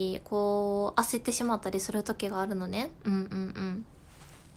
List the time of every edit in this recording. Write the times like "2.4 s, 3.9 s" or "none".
3.0 s